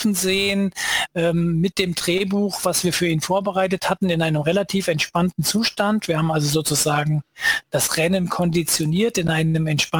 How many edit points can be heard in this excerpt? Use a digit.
0